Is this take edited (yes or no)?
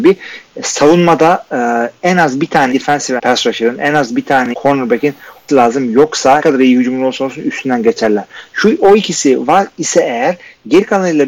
yes